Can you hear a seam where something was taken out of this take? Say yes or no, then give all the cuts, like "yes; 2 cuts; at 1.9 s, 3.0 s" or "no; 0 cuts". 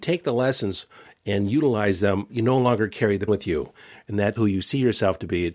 yes; 3 cuts; at 2.3 s, 3.3 s, 4.4 s